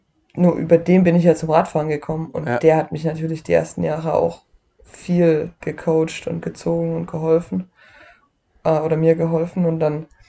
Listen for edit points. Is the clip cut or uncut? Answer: uncut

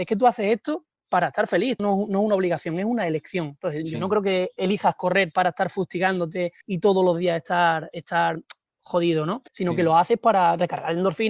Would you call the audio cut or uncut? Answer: cut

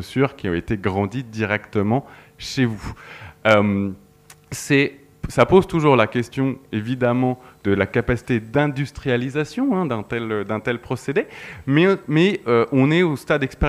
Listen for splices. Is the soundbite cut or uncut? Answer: uncut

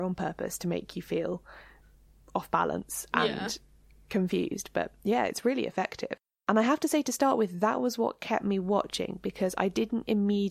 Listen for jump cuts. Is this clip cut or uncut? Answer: uncut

